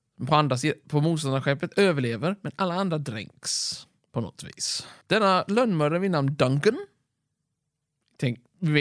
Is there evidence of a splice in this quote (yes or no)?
yes